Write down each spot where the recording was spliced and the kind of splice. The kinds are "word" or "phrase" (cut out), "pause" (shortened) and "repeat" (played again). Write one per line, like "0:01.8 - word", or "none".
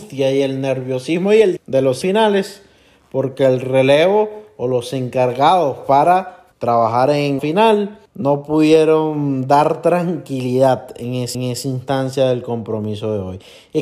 0:01.6 - word
0:02.0 - word
0:06.5 - pause
0:07.4 - phrase
0:08.1 - pause
0:11.3 - repeat

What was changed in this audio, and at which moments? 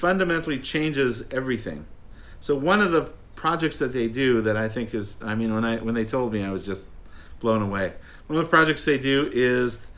none

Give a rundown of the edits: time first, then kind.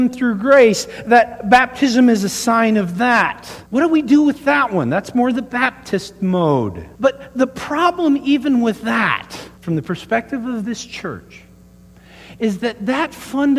0:03.6 - pause
0:06.9 - pause
0:09.6 - pause

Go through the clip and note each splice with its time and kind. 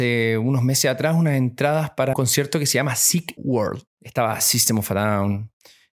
0:02.1 - word
0:03.4 - word
0:03.9 - pause

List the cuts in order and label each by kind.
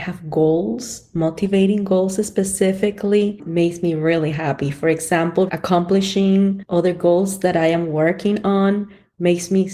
0:05.5 - phrase

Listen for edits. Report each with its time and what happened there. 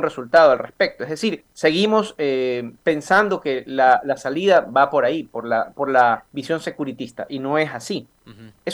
0:01.5 - pause
0:06.3 - pause

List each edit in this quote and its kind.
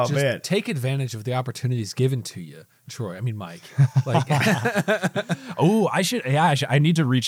none

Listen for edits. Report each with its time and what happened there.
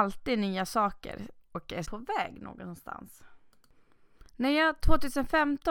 0:01.8 - word
0:04.3 - pause

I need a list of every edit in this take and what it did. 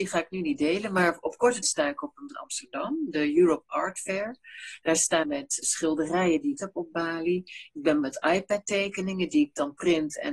0:01.6 - word
0:02.3 - word
0:05.2 - word
0:05.6 - word
0:06.6 - word
0:08.0 - word

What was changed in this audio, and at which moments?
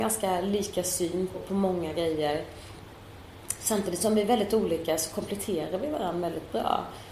0:01.3 - word

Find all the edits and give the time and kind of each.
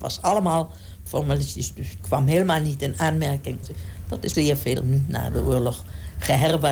0:02.0 - word
0:03.6 - word
0:04.3 - word
0:04.8 - word

